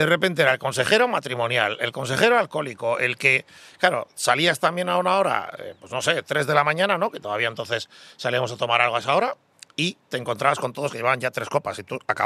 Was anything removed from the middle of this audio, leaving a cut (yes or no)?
no